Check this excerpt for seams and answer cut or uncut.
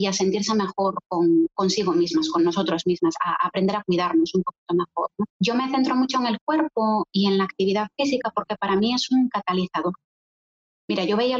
cut